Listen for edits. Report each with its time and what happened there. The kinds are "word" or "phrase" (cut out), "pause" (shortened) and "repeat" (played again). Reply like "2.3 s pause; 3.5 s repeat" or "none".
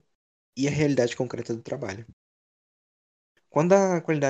none